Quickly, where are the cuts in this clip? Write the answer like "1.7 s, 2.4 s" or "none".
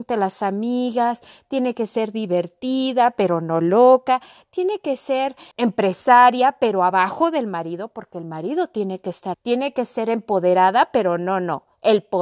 5.5 s, 9.3 s